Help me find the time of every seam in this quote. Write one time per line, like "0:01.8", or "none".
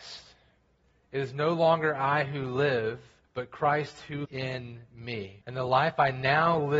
0:03.2
0:04.2
0:05.4